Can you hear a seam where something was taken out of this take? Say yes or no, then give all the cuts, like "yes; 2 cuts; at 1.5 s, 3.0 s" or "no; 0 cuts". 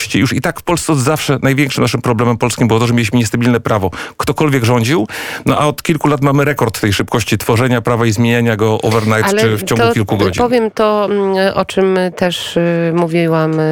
no; 0 cuts